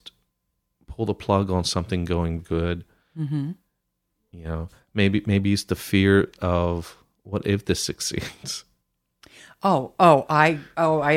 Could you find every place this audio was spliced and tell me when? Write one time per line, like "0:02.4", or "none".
0:02.4